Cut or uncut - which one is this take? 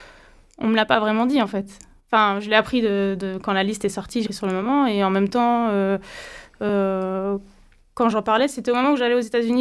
cut